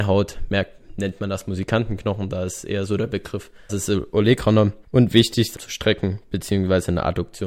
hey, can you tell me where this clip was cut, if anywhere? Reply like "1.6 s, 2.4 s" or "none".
3.7 s, 4.8 s, 5.5 s